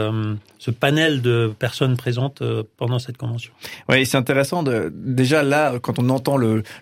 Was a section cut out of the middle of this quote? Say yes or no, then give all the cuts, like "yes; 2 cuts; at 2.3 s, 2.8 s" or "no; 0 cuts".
no; 0 cuts